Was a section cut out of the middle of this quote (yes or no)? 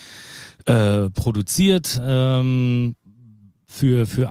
no